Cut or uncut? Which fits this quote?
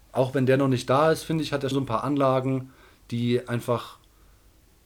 cut